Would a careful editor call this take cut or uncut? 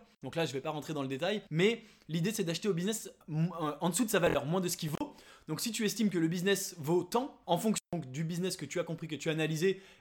cut